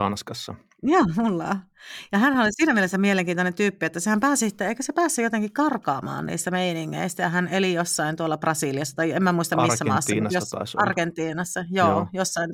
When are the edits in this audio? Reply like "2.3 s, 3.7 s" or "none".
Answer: none